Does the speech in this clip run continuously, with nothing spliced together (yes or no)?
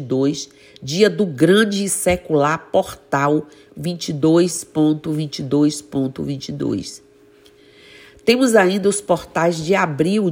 yes